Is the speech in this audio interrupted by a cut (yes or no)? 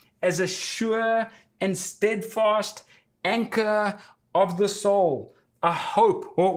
no